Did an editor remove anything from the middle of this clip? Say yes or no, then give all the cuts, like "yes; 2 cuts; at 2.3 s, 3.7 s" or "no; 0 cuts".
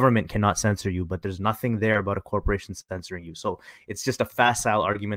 no; 0 cuts